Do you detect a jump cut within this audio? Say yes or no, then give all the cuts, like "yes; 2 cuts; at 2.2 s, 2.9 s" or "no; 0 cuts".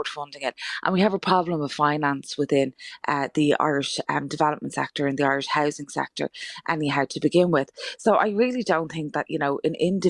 no; 0 cuts